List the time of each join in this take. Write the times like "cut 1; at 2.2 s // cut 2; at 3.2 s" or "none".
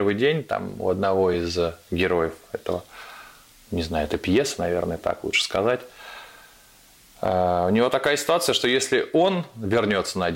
none